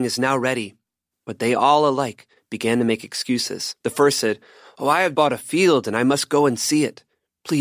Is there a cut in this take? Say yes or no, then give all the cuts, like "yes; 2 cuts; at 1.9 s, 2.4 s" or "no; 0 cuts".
yes; 2 cuts; at 3.8 s, 5.1 s